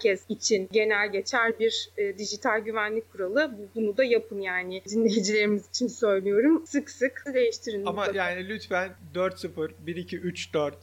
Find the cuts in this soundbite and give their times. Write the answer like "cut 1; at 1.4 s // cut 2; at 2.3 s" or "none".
cut 1; at 7.3 s